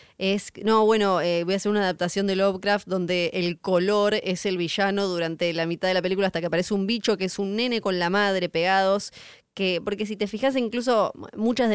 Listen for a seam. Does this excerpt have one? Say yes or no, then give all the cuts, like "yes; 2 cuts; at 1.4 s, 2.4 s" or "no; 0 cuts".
no; 0 cuts